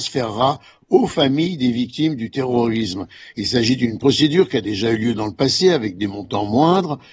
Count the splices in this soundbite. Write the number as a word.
zero